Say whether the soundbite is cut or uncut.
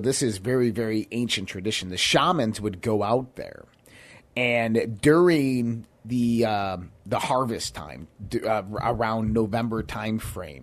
uncut